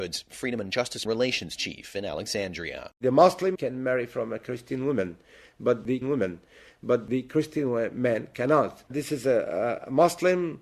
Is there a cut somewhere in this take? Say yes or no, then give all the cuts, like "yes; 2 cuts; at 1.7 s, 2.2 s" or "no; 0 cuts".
yes; 4 cuts; at 1.0 s, 3.5 s, 6.0 s, 8.9 s